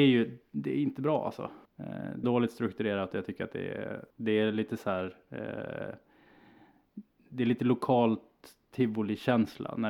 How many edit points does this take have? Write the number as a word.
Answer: three